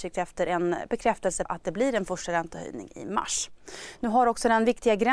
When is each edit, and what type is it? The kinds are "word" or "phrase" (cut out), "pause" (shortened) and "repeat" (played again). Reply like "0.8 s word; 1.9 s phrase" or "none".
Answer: 1.5 s word